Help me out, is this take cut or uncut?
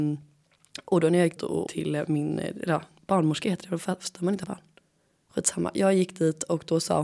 cut